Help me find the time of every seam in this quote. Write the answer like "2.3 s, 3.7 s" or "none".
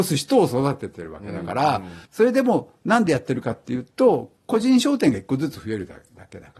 2.1 s